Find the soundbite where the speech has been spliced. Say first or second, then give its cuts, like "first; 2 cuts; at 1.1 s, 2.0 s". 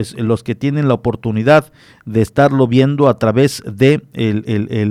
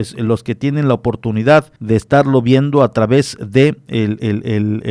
second; 1 cut; at 1.8 s